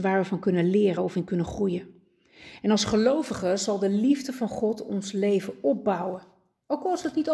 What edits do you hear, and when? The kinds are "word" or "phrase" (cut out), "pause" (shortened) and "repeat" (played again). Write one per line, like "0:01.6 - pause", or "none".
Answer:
none